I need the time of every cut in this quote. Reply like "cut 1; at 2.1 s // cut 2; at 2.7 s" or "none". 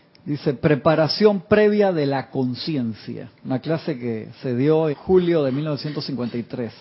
cut 1; at 3.4 s // cut 2; at 4.9 s